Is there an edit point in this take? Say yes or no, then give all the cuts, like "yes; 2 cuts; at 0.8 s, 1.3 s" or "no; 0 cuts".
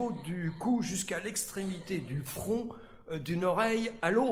no; 0 cuts